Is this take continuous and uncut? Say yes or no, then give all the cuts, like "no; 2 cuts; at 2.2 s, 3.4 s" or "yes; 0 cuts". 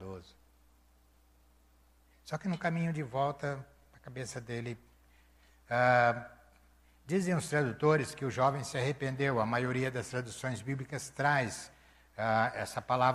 yes; 0 cuts